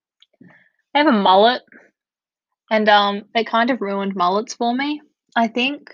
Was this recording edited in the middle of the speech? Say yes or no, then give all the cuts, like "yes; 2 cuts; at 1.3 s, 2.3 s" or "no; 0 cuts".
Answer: no; 0 cuts